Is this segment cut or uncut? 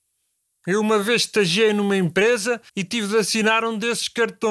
cut